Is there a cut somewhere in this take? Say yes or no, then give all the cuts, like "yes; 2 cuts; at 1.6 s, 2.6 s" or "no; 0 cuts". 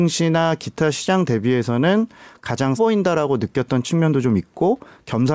yes; 1 cut; at 2.8 s